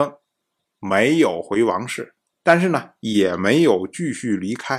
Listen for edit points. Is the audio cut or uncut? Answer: uncut